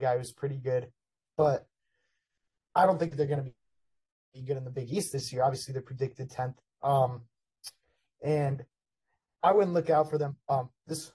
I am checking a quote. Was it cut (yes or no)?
no